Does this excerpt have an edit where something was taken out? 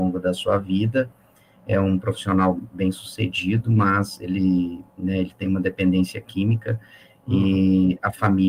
no; 0 cuts

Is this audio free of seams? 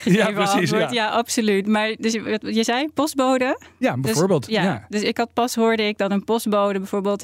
yes; 0 cuts

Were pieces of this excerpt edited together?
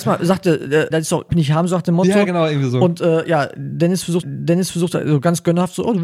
yes; 3 cuts; at 0.9 s, 1.3 s, 4.2 s

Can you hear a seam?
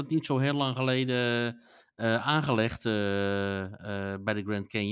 no; 0 cuts

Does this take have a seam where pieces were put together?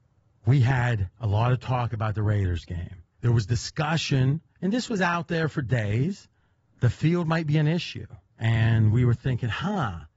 yes; 5 cuts; at 1.1 s, 3.1 s, 4.5 s, 6.5 s, 8.3 s

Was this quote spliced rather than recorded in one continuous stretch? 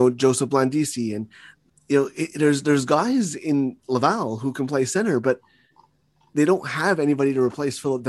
no; 0 cuts

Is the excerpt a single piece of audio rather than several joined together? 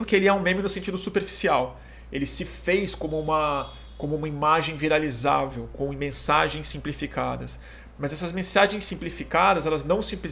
yes; 0 cuts

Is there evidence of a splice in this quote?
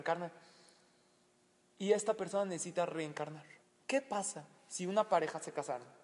yes; 1 cut; at 3.6 s

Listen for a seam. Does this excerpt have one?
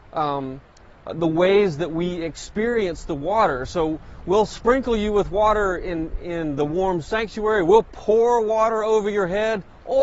no; 0 cuts

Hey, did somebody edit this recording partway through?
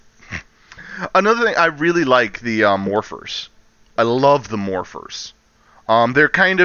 no; 0 cuts

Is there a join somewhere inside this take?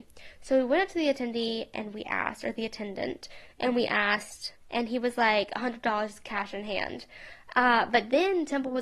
yes; 1 cut; at 4.6 s

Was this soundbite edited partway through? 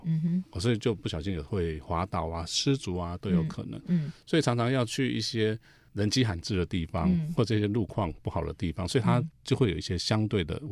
no; 0 cuts

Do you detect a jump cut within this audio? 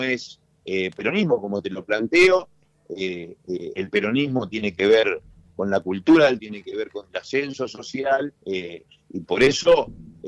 yes; 2 cuts; at 6.4 s, 8.4 s

